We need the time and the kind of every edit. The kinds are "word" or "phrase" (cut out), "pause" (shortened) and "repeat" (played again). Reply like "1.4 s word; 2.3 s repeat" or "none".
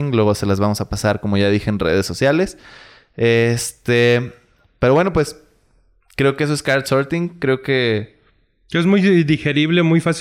none